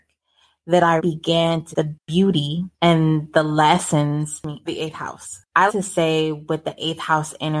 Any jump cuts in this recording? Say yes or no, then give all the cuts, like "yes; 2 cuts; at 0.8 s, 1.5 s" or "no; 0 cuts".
yes; 5 cuts; at 1.0 s, 1.7 s, 2.7 s, 4.7 s, 5.7 s